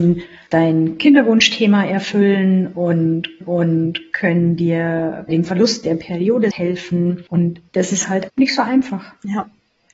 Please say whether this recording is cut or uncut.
cut